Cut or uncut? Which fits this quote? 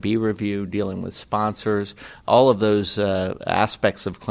uncut